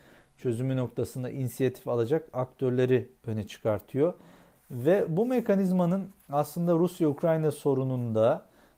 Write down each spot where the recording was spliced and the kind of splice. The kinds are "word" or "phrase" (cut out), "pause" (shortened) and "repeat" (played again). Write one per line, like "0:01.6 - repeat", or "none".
none